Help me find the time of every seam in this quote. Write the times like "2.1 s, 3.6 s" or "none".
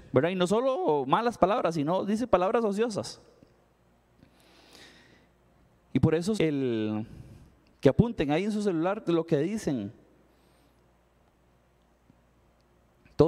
6.4 s